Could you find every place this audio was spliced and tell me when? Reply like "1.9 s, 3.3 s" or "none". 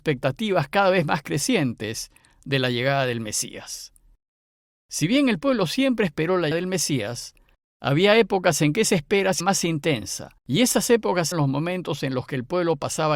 6.5 s, 9.4 s, 10.4 s, 11.3 s

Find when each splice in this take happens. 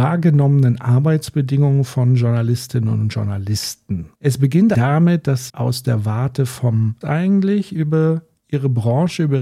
4.1 s, 4.7 s, 5.5 s, 7.0 s

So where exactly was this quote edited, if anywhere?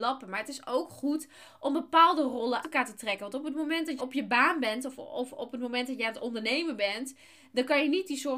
2.6 s, 4.0 s

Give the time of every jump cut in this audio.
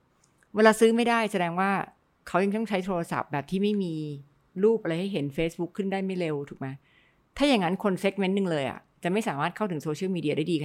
none

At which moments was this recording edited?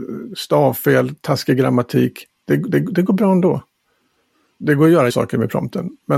2.7 s, 5.1 s

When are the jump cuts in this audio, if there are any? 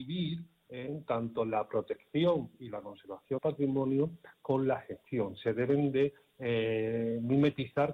3.4 s

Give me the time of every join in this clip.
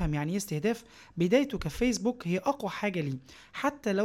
none

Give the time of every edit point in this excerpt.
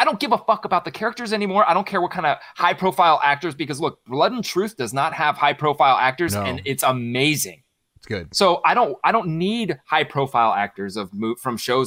none

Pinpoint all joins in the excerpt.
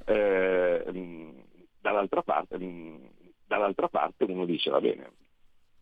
2.5 s

